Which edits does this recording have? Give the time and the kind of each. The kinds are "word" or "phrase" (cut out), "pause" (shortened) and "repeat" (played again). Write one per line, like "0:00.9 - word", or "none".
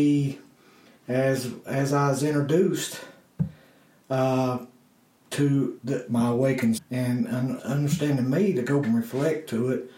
0:05.8 - word
0:06.8 - word
0:07.6 - word
0:08.8 - word